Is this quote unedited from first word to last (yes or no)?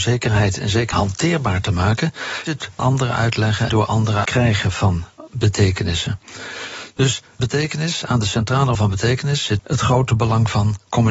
no